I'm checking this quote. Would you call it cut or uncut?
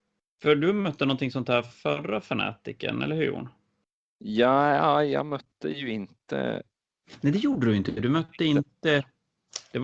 uncut